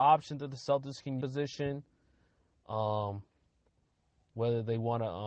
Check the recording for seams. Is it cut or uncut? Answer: cut